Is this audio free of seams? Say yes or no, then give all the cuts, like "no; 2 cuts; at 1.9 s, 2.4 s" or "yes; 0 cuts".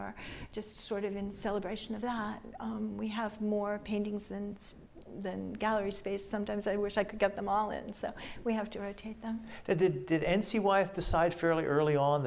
yes; 0 cuts